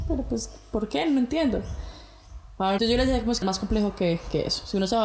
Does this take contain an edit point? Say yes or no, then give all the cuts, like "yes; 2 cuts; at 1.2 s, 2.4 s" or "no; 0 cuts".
yes; 2 cuts; at 2.8 s, 3.4 s